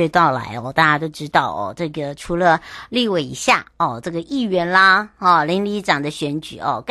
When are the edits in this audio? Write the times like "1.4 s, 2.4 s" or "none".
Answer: none